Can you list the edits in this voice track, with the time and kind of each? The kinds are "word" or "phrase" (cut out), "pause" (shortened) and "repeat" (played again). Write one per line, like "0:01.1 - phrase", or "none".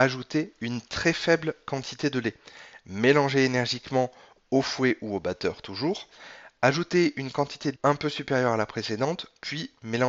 0:07.8 - word